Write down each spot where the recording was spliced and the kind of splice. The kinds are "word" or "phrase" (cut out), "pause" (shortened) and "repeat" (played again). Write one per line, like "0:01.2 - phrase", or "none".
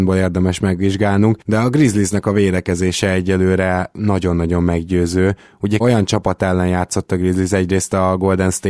0:05.8 - word